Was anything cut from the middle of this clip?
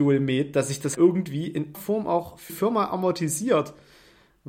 yes; 3 cuts; at 0.9 s, 1.7 s, 2.5 s

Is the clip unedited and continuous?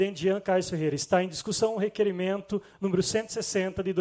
yes; 0 cuts

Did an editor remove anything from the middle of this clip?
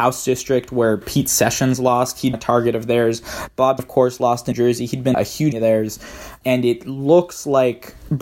yes; 6 cuts; at 1.0 s, 2.3 s, 3.8 s, 4.5 s, 5.1 s, 5.5 s

